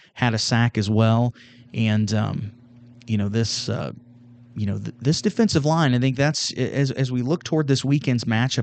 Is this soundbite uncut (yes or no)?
yes